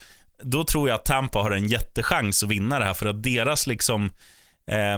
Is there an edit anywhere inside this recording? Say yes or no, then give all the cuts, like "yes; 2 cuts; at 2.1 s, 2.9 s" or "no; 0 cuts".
no; 0 cuts